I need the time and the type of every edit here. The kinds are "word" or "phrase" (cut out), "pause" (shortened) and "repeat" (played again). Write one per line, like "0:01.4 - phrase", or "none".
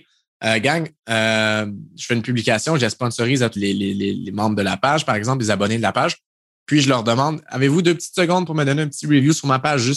0:03.6 - word